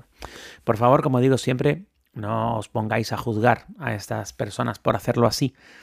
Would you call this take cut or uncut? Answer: uncut